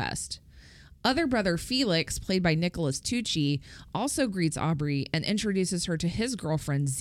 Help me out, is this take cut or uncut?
uncut